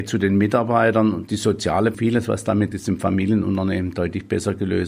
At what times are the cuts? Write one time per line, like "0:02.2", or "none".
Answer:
0:01.9
0:02.7